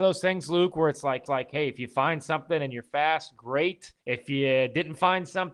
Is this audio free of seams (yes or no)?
no